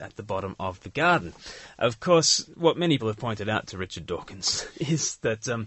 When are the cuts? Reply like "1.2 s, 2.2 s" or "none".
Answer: 3.0 s

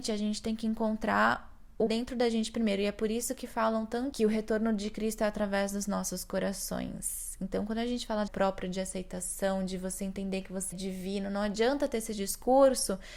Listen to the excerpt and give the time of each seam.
1.9 s, 4.1 s, 8.3 s, 10.7 s

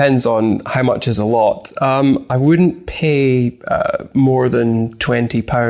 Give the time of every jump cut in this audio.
none

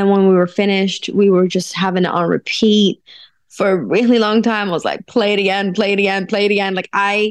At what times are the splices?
none

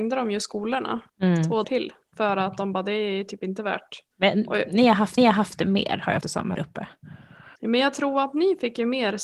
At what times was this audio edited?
1.1 s, 1.6 s, 4.1 s, 5.2 s, 6.2 s, 6.5 s, 7.6 s

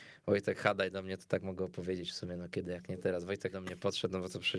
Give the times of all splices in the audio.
3.5 s

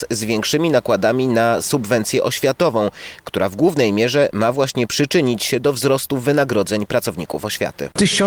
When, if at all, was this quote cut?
none

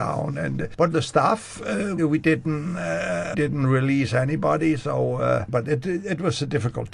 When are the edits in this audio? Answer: 0.9 s, 2.0 s, 3.3 s

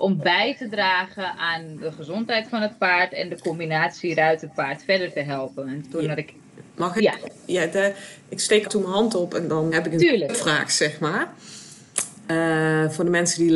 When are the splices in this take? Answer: 8.6 s, 9.7 s

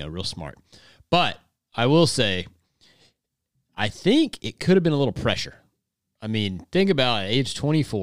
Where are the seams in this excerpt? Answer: none

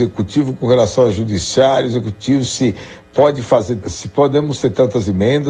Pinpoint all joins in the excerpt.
3.8 s

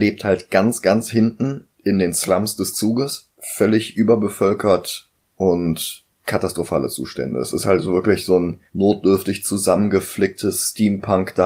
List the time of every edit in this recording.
1.7 s, 3.3 s, 6.1 s, 8.7 s

